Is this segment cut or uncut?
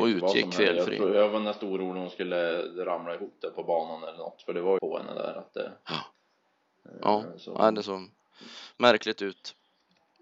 cut